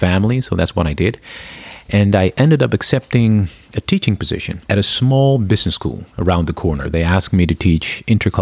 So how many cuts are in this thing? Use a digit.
1